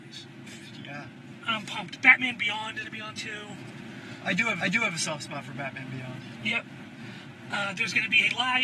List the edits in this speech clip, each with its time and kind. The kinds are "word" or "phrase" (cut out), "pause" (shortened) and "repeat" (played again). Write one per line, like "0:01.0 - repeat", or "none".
0:02.8 - word
0:03.1 - word
0:04.6 - repeat